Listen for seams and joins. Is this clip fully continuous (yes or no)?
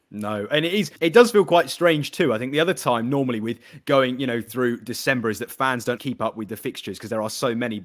no